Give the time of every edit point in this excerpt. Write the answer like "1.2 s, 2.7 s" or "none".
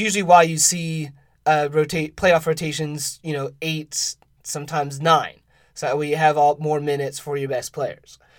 none

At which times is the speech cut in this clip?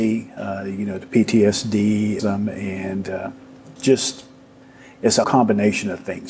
2.2 s, 3.8 s, 5.2 s

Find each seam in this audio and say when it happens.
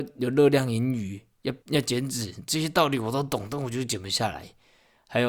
1.6 s

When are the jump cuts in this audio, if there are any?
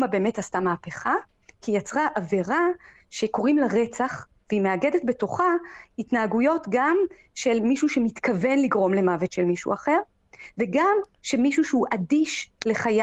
none

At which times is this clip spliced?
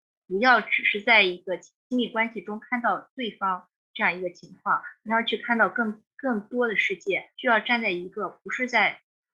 7.3 s

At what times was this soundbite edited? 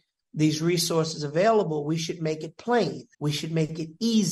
3.1 s

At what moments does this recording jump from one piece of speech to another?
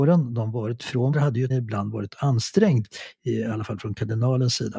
1.1 s, 1.5 s, 2.1 s

